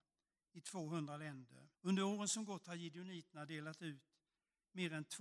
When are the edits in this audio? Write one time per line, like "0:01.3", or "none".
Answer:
0:01.7